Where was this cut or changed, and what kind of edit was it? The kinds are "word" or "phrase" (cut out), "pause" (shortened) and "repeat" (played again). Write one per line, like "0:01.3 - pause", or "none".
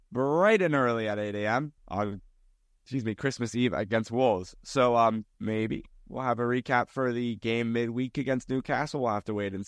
0:01.8 - pause
0:05.3 - pause